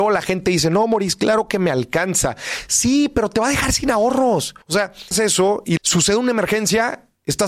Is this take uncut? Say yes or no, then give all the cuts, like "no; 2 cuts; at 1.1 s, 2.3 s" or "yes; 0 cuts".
no; 3 cuts; at 4.6 s, 5.1 s, 5.8 s